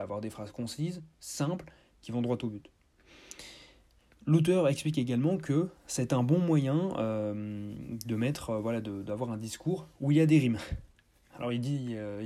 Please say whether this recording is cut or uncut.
uncut